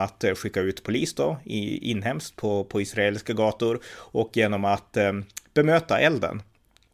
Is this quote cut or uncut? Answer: uncut